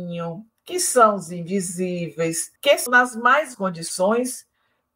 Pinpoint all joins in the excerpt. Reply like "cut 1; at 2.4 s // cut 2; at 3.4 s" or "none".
cut 1; at 2.6 s // cut 2; at 2.9 s // cut 3; at 3.5 s